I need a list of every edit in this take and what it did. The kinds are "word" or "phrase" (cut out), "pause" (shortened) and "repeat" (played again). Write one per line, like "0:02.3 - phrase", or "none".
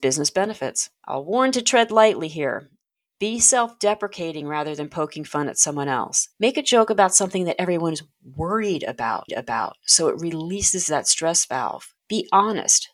0:01.0 - pause
0:06.3 - pause
0:09.3 - repeat
0:12.0 - pause